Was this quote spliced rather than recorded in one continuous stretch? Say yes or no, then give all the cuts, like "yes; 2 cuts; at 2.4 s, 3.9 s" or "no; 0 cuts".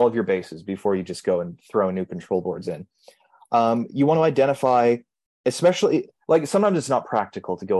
no; 0 cuts